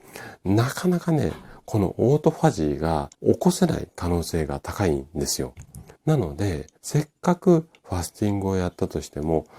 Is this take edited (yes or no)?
yes